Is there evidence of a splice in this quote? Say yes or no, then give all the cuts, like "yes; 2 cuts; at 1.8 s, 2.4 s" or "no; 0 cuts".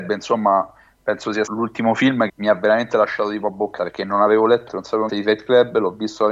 yes; 5 cuts; at 1.5 s, 2.3 s, 3.8 s, 4.7 s, 5.1 s